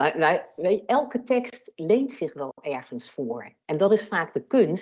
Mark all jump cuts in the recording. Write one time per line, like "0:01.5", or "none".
none